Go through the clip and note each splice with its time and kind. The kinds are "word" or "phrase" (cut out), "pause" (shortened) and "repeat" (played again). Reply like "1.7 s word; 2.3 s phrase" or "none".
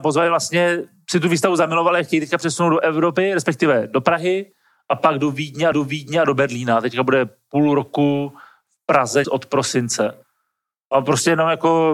5.7 s repeat; 9.2 s phrase